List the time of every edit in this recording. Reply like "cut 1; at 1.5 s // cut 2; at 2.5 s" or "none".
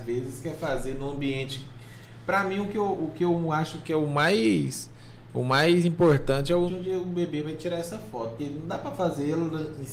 cut 1; at 6.7 s // cut 2; at 8.4 s